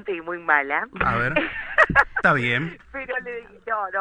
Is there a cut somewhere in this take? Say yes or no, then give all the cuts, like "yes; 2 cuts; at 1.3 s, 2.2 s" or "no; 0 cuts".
no; 0 cuts